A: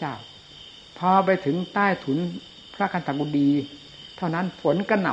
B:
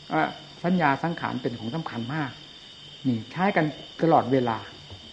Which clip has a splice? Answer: B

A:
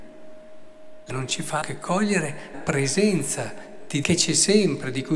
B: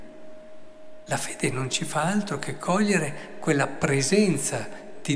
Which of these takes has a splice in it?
A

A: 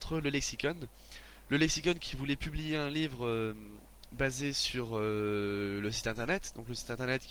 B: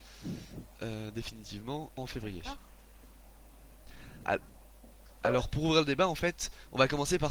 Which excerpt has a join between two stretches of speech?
B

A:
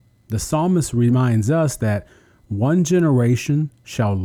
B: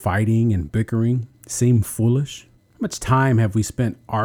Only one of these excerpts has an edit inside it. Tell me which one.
B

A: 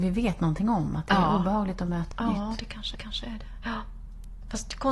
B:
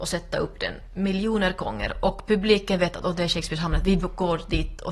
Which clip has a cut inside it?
A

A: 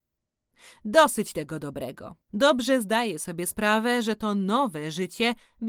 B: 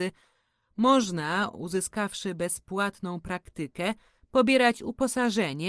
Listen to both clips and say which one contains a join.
A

